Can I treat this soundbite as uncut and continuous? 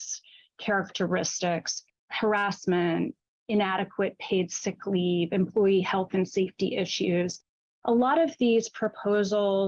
yes; 0 cuts

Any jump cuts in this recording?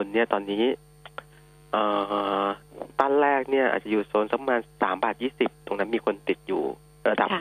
no; 0 cuts

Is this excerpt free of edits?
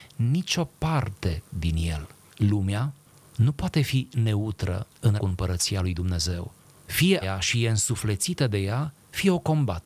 no; 3 cuts; at 2.2 s, 5.2 s, 7.2 s

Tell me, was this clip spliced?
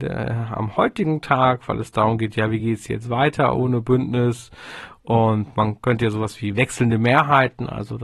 no; 0 cuts

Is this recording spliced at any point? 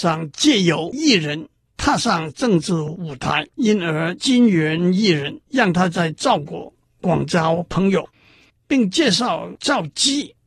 yes; 2 cuts; at 3.5 s, 5.4 s

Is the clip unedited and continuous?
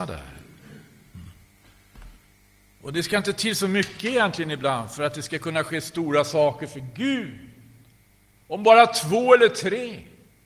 yes; 0 cuts

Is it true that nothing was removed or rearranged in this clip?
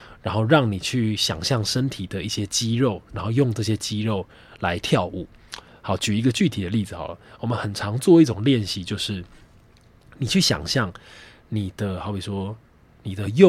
yes; 0 cuts

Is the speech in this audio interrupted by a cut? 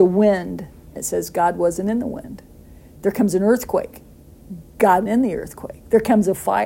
yes; 2 cuts; at 1.0 s, 5.1 s

